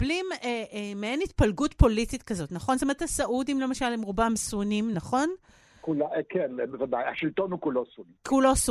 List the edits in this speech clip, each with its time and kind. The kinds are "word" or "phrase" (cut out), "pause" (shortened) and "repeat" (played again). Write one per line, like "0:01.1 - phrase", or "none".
none